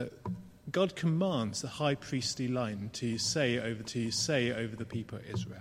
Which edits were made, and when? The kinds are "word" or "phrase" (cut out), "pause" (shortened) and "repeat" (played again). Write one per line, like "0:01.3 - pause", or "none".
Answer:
0:03.8 - repeat